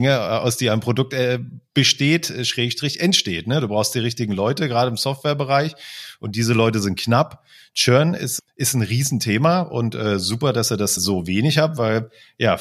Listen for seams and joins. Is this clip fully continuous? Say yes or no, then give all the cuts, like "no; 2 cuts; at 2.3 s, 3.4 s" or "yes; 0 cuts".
no; 2 cuts; at 1.7 s, 11.0 s